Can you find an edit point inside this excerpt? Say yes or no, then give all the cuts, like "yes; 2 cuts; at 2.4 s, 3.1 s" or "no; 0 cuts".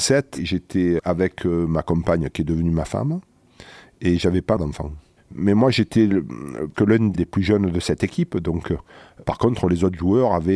yes; 4 cuts; at 1.0 s, 4.6 s, 6.7 s, 9.2 s